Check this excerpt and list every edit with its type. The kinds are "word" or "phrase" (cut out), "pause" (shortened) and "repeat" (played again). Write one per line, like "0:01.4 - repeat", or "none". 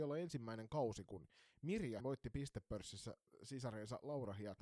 0:02.0 - word